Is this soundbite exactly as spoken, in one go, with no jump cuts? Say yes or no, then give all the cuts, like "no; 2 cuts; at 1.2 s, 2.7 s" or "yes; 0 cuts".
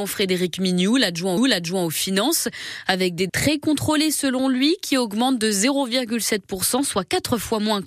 no; 2 cuts; at 1.4 s, 3.3 s